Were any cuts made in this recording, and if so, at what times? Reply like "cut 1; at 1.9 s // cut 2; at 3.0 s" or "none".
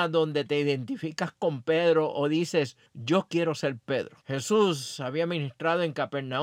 cut 1; at 2.9 s // cut 2; at 4.2 s